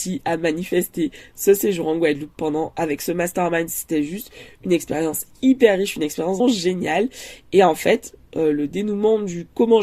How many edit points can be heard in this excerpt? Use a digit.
1